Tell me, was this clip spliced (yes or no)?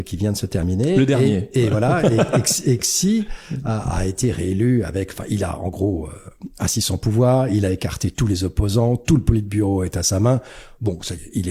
no